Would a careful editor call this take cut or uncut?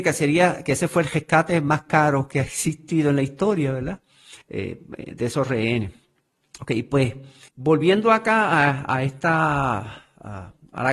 cut